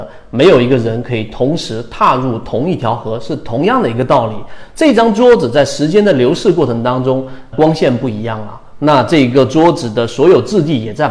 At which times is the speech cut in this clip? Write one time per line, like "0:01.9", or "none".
0:07.5

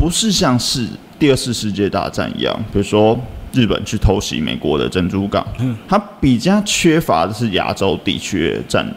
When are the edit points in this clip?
0:05.6

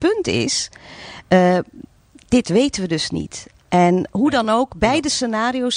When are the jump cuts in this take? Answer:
none

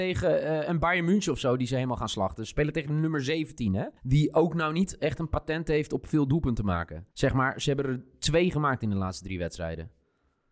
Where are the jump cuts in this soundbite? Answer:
0:04.0
0:07.1

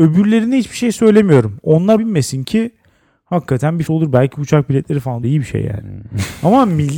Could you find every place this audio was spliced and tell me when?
0:02.0
0:03.9
0:05.2

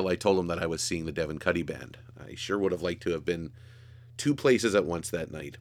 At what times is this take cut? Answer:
none

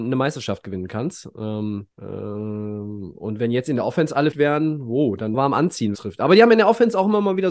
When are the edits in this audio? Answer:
0:01.9
0:04.3
0:05.3
0:05.9

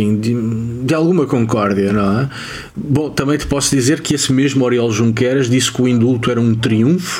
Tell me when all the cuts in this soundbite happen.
none

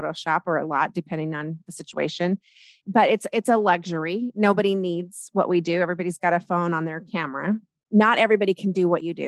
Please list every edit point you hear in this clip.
none

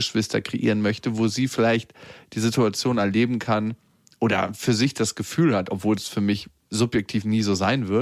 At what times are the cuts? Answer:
none

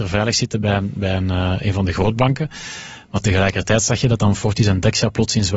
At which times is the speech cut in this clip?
none

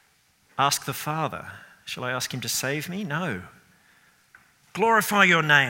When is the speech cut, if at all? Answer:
none

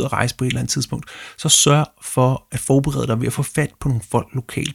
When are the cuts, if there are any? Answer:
none

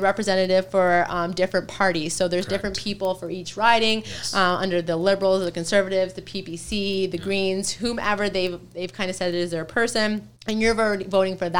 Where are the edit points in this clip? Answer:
0:10.4

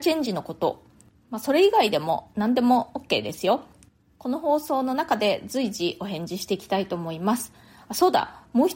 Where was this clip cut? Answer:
none

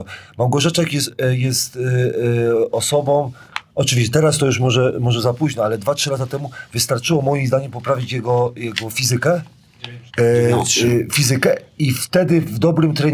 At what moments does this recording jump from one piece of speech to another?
0:10.1

